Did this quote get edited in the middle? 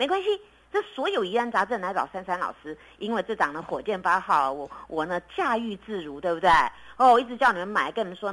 no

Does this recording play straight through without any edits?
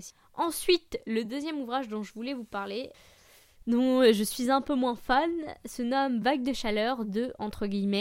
yes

